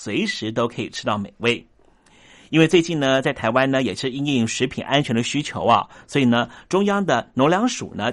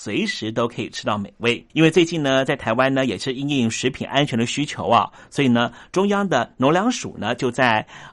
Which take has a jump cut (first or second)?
second